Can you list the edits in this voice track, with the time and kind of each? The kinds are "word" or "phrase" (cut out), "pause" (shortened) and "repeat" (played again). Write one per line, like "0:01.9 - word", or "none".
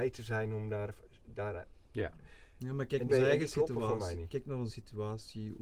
0:03.1 - word
0:04.7 - word